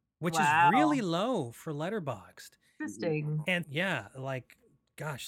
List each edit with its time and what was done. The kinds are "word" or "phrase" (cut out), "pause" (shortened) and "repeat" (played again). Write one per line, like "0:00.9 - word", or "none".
0:03.6 - word